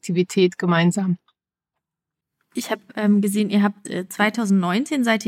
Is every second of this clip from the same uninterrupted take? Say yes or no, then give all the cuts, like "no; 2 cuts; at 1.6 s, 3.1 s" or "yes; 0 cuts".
yes; 0 cuts